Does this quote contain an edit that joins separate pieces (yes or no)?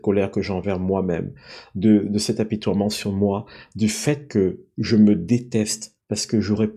no